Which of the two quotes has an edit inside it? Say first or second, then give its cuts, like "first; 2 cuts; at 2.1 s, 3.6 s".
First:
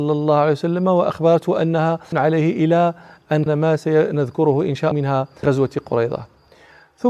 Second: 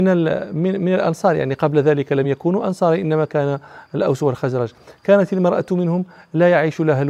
first; 4 cuts; at 2.1 s, 3.5 s, 4.9 s, 5.4 s